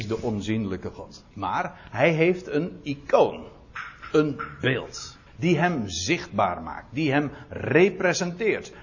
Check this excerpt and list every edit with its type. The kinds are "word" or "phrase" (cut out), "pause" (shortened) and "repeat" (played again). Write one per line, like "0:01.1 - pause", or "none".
0:01.3 - pause
0:05.3 - pause